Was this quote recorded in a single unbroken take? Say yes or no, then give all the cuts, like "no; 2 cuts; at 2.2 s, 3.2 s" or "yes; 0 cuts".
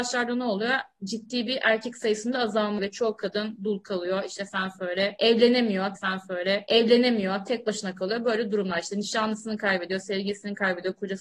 no; 2 cuts; at 2.8 s, 6.0 s